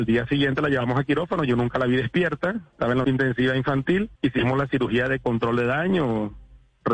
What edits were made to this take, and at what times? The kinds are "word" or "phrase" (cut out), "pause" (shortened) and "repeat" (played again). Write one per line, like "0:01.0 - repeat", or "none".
0:03.0 - phrase
0:04.2 - pause